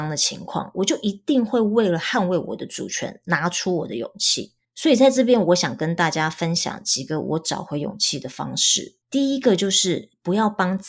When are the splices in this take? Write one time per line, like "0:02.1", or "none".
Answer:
0:09.0